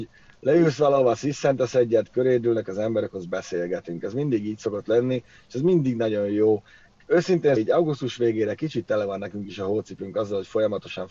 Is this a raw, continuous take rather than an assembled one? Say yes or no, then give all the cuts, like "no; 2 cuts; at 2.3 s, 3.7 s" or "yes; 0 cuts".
no; 1 cut; at 7.6 s